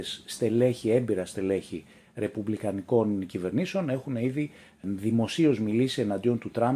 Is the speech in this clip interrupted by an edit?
no; 0 cuts

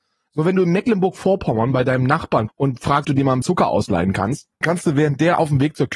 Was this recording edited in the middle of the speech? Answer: yes; 4 cuts; at 2.5 s, 3.0 s, 3.4 s, 4.6 s

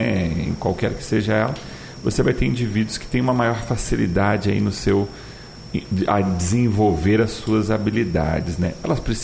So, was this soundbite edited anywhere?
no; 0 cuts

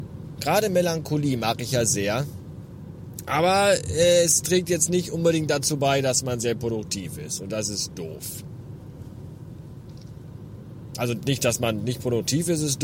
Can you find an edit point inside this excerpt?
no; 0 cuts

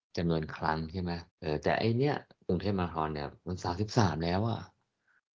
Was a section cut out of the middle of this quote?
yes; 2 cuts; at 1.3 s, 2.3 s

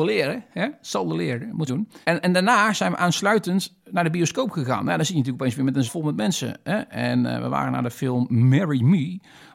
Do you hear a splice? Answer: yes; 3 cuts; at 1.7 s, 2.0 s, 5.9 s

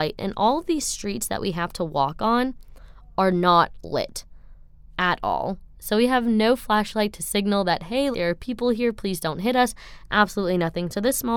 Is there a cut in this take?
yes; 1 cut; at 8.1 s

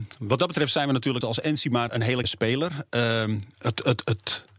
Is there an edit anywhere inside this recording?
yes; 3 cuts; at 1.2 s, 1.9 s, 2.2 s

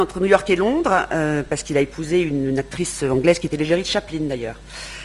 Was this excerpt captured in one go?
yes; 0 cuts

